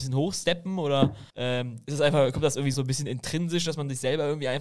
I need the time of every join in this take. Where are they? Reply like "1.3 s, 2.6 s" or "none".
1.3 s, 2.7 s